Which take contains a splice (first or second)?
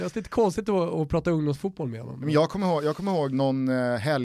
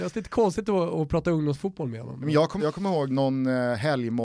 second